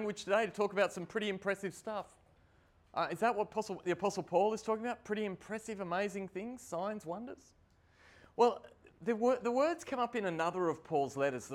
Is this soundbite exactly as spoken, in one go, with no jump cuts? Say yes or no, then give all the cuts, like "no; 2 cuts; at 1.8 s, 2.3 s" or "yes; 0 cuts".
yes; 0 cuts